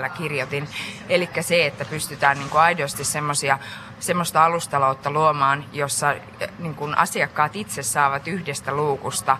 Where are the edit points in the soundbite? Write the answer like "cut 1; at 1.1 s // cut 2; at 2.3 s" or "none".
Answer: none